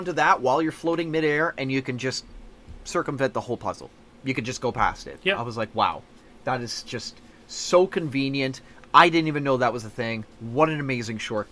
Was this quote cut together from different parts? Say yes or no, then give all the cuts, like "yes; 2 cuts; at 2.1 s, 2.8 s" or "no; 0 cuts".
no; 0 cuts